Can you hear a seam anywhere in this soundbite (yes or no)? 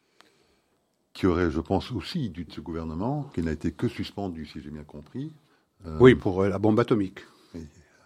yes